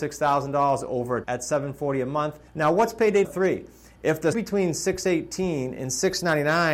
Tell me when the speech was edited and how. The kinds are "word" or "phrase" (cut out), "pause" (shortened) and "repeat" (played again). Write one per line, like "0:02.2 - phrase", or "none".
0:01.2 - word
0:02.5 - pause
0:03.2 - word
0:04.3 - word